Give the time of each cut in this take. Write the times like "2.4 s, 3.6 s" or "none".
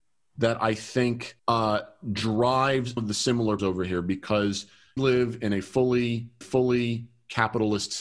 1.4 s, 3.0 s, 3.6 s, 5.0 s, 6.4 s